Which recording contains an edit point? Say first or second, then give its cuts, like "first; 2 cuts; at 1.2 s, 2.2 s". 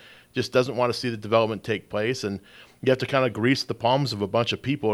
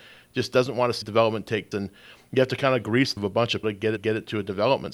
second; 5 cuts; at 1.0 s, 1.7 s, 3.2 s, 3.6 s, 4.0 s